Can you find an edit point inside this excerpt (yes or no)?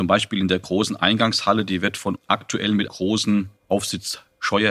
yes